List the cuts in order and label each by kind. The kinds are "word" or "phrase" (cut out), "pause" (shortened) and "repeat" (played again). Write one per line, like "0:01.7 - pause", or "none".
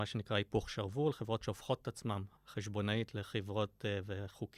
0:01.4 - word
0:02.4 - pause